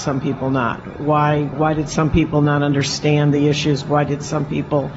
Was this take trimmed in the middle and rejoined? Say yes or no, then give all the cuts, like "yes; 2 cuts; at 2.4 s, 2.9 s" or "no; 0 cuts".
yes; 1 cut; at 1.5 s